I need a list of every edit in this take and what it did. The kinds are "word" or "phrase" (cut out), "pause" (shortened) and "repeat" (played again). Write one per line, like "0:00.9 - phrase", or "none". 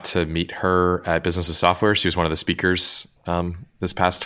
none